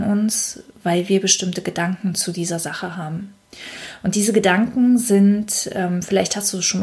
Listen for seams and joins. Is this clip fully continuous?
yes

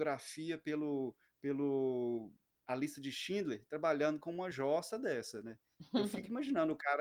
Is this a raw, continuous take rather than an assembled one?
yes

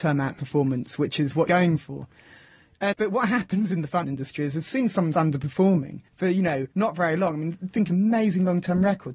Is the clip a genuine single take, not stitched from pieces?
no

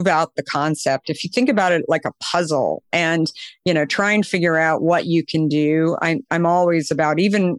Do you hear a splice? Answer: no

